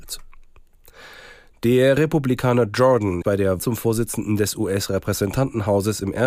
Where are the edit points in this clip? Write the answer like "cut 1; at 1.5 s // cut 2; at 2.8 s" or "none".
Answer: cut 1; at 3.2 s // cut 2; at 3.6 s